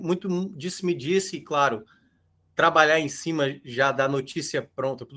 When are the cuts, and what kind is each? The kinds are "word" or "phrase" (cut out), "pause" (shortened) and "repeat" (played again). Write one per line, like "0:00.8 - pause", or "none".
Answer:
none